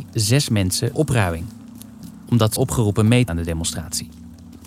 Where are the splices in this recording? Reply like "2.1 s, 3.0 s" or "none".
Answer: 0.9 s, 2.6 s, 3.3 s